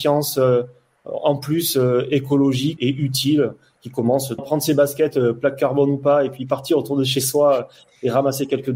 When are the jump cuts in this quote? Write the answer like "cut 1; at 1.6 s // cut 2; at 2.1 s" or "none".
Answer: cut 1; at 2.8 s // cut 2; at 4.4 s